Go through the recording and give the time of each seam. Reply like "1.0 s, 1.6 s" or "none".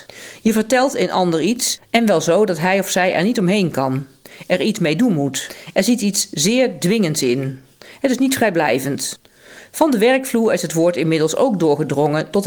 none